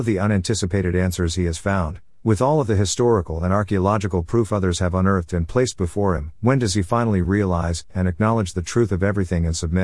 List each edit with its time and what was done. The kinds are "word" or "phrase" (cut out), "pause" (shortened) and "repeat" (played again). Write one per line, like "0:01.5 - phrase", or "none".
none